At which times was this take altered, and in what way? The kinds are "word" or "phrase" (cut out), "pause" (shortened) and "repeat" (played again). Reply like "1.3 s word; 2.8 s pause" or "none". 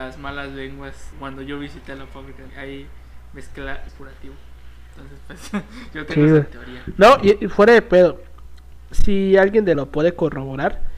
1.1 s word; 2.5 s phrase; 3.9 s phrase; 9.7 s phrase